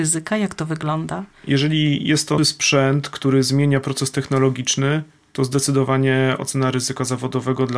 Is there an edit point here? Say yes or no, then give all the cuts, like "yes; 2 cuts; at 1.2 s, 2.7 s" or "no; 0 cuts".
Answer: yes; 1 cut; at 2.4 s